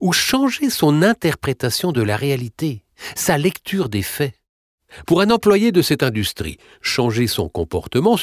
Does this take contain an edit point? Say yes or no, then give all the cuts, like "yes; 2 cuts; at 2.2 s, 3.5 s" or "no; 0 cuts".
no; 0 cuts